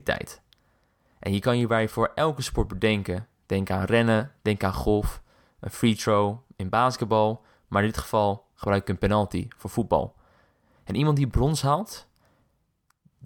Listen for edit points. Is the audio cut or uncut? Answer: uncut